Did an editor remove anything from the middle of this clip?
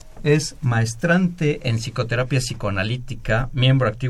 no; 0 cuts

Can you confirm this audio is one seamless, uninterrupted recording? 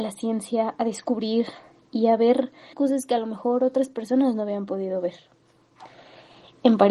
no; 1 cut; at 2.7 s

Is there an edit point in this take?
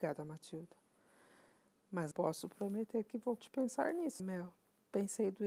yes; 3 cuts; at 2.1 s, 3.4 s, 4.2 s

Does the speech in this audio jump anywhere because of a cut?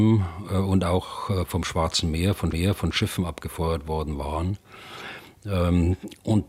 yes; 1 cut; at 2.5 s

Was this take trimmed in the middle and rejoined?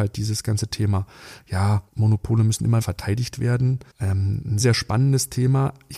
yes; 4 cuts; at 1.9 s, 2.8 s, 3.9 s, 4.6 s

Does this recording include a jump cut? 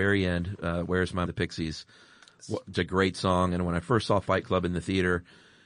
yes; 2 cuts; at 1.3 s, 2.7 s

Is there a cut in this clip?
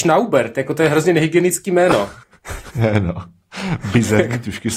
yes; 1 cut; at 2.2 s

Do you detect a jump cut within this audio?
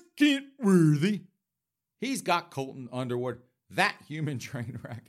no; 0 cuts

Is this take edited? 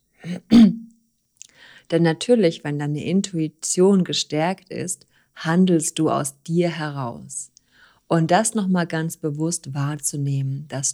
no; 0 cuts

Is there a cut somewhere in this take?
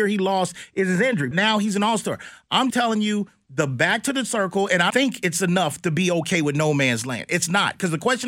yes; 3 cuts; at 1.3 s, 2.7 s, 4.9 s

